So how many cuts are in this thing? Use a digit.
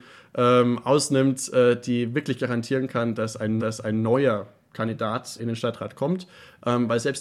2